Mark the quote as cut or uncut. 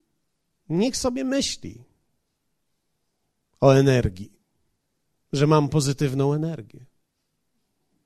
uncut